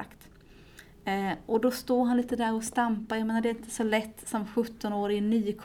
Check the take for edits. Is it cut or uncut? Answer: uncut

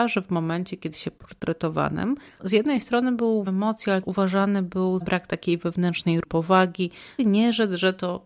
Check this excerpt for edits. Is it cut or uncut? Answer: cut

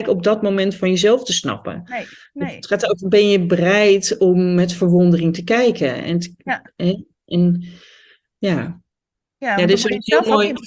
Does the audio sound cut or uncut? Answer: uncut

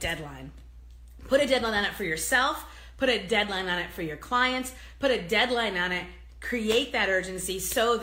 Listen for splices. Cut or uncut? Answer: uncut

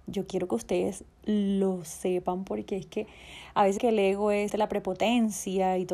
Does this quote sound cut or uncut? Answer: cut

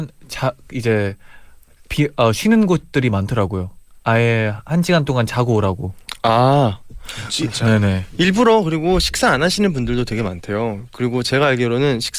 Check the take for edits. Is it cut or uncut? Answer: uncut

